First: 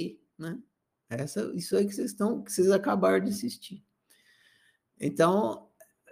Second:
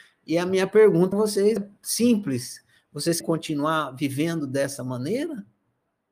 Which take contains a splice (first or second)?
second